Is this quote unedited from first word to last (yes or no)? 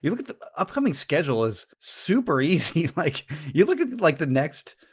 no